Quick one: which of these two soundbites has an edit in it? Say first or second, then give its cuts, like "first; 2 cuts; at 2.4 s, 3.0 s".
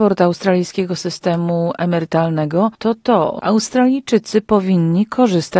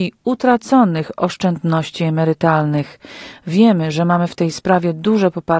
first; 2 cuts; at 2.7 s, 3.4 s